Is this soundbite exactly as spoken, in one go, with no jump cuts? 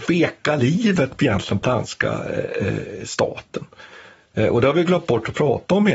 no; 1 cut; at 1.6 s

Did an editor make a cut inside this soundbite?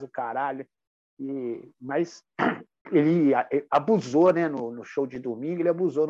yes; 1 cut; at 2.8 s

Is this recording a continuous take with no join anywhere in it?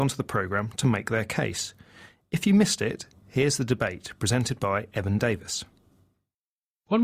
yes; 0 cuts

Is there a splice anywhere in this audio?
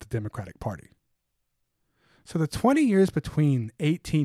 no; 0 cuts

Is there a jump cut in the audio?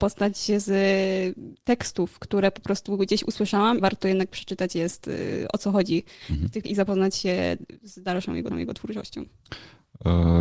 yes; 3 cuts; at 3.8 s, 6.6 s, 8.5 s

